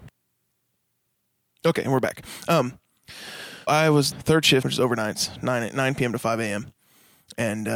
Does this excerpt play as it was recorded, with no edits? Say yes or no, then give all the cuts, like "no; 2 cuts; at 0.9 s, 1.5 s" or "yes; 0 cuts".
no; 3 cuts; at 3.7 s, 4.1 s, 4.6 s